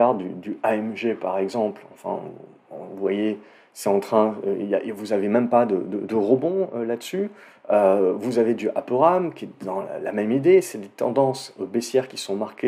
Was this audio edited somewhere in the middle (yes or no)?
no